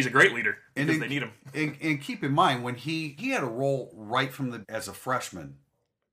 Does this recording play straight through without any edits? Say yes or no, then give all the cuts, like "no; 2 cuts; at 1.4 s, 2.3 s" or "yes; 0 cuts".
no; 2 cuts; at 3.2 s, 4.6 s